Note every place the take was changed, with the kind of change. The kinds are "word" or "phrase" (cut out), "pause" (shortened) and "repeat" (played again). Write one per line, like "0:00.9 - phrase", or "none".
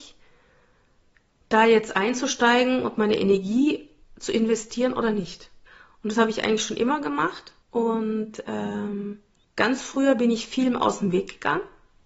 0:05.7 - pause
0:07.6 - pause
0:09.4 - pause

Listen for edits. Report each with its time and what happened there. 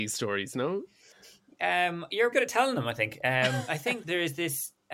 0:02.3 - word
0:03.7 - word
0:04.0 - word

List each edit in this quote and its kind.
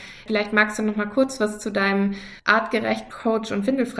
none

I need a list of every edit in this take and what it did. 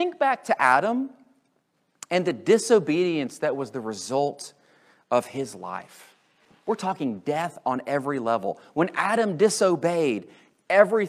none

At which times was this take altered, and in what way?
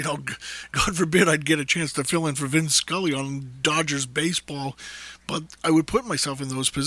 0:05.6 - pause

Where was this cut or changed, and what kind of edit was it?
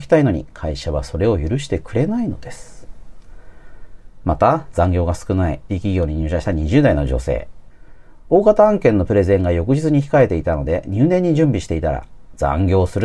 0:05.7 - word

